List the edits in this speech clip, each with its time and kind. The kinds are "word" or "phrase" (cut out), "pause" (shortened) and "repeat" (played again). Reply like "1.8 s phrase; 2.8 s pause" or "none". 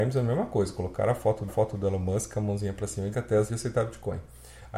1.5 s repeat; 3.1 s word; 3.5 s word